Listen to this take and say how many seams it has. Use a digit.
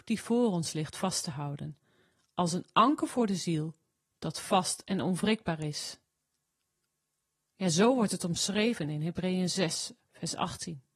0